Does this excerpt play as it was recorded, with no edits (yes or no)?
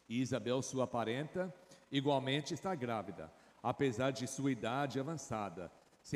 yes